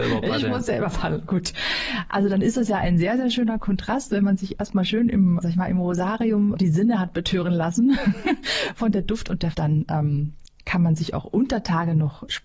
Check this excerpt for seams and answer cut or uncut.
cut